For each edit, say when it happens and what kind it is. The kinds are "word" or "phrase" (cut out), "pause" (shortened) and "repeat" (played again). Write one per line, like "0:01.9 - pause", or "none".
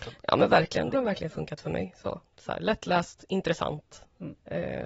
0:00.9 - phrase
0:02.3 - pause

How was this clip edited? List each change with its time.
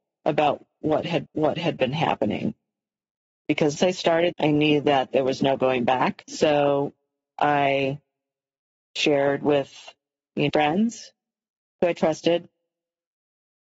0:01.3 - repeat
0:03.8 - word
0:04.3 - word
0:10.5 - phrase

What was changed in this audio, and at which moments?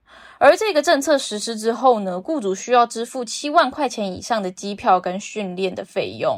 none

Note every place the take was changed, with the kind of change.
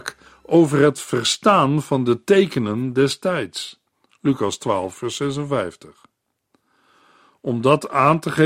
none

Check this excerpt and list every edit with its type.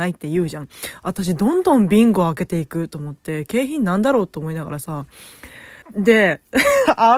0:05.8 - pause

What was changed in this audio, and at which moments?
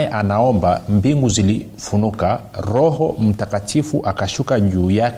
none

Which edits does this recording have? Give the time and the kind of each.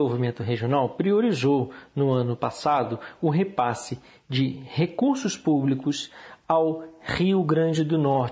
none

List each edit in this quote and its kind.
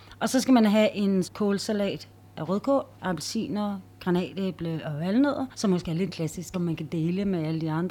0:01.2 - word
0:02.9 - pause
0:05.5 - pause
0:06.1 - word
0:06.5 - word

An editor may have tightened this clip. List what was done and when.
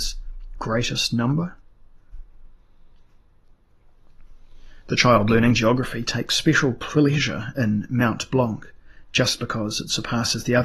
none

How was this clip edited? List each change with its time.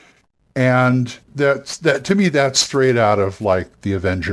none

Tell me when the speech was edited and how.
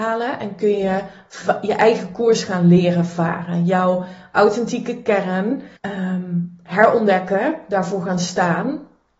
0:05.8 - pause

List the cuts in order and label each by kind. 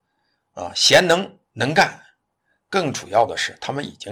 0:01.5 - pause

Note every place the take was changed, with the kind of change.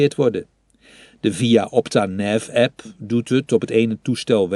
none

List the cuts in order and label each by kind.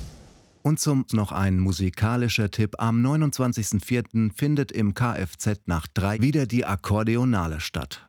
0:01.1 - word
0:04.9 - word
0:06.1 - phrase

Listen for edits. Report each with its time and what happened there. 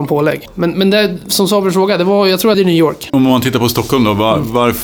0:02.5 - phrase

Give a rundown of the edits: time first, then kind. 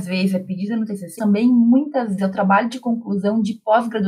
0:01.2 - word
0:02.2 - word

